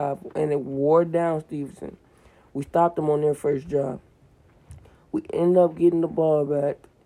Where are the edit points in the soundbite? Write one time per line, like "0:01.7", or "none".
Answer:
none